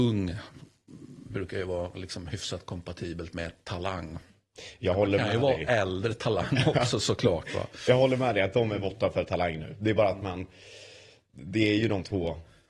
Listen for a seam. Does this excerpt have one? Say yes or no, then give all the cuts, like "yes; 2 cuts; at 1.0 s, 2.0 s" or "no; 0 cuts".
no; 0 cuts